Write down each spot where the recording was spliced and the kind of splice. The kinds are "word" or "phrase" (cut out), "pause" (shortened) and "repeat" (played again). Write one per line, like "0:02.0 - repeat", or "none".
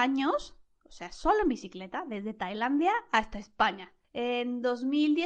none